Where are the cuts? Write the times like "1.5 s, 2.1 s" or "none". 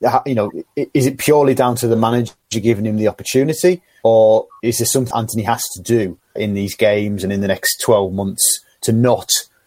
5.1 s, 6.4 s